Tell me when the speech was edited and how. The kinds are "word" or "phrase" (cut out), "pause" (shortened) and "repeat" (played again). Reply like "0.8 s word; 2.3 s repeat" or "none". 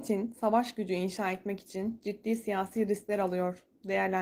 none